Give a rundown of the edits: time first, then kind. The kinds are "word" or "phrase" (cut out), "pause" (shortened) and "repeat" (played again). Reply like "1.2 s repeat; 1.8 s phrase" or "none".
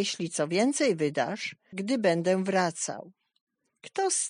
1.7 s phrase